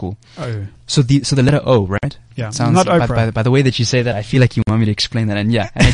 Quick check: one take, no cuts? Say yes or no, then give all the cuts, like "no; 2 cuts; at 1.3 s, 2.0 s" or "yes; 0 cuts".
yes; 0 cuts